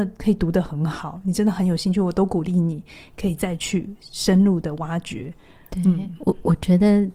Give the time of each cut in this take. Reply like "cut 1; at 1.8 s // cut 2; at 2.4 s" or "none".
none